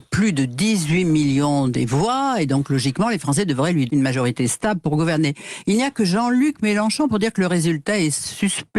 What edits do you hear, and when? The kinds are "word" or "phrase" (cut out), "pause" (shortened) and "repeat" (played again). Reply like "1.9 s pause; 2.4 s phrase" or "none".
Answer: 3.9 s word